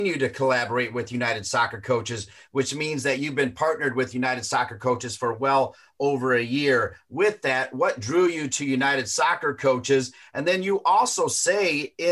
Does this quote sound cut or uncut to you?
uncut